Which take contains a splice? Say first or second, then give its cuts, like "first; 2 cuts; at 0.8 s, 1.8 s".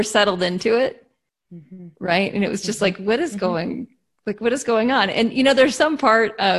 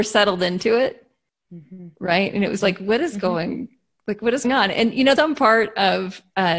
second; 3 cuts; at 2.6 s, 4.4 s, 5.2 s